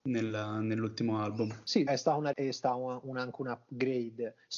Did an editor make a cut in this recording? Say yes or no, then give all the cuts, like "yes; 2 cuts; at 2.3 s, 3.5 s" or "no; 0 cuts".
yes; 2 cuts; at 1.9 s, 2.3 s